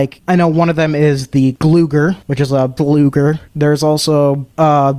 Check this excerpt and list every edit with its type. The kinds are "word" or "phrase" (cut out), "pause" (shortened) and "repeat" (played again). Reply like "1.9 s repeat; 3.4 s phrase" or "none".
2.8 s phrase

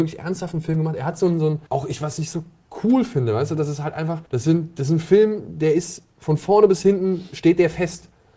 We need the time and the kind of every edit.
1.7 s pause; 4.3 s pause

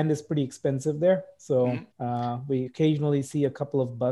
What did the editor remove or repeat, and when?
1.9 s pause; 2.7 s word

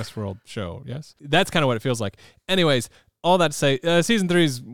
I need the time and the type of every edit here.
none

